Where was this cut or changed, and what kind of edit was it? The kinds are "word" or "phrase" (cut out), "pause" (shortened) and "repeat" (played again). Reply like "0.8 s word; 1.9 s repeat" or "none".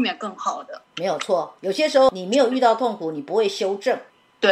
1.6 s pause